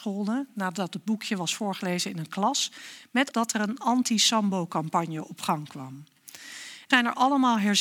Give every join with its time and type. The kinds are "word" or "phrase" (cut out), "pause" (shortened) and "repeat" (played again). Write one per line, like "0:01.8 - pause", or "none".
0:03.3 - phrase
0:06.9 - word

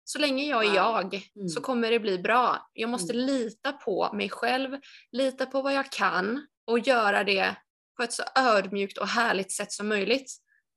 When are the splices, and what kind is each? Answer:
0:01.3 - pause
0:06.5 - pause
0:07.7 - pause

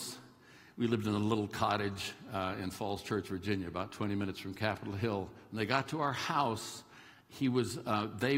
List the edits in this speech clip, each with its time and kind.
none

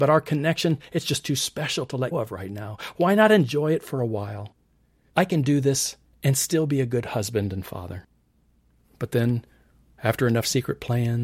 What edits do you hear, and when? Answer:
0:02.1 - word

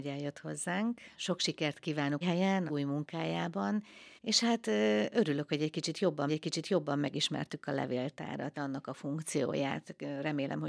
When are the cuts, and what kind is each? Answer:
0:01.1 - pause
0:02.2 - phrase
0:02.7 - word
0:04.2 - pause
0:06.3 - repeat
0:08.5 - word

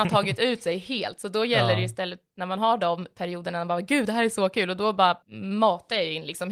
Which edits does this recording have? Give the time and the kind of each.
0:05.2 - pause

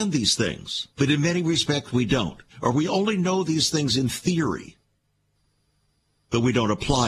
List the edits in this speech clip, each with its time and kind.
0:00.9 - pause
0:02.5 - pause

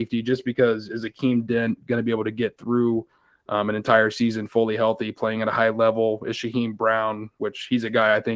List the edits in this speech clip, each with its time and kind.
none

